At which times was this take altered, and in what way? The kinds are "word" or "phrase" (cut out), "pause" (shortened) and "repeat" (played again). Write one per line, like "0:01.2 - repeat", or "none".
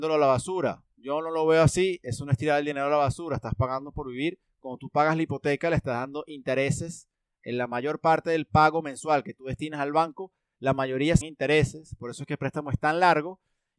0:11.2 - word